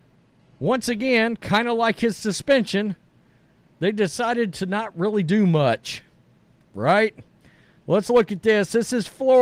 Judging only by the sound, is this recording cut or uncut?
uncut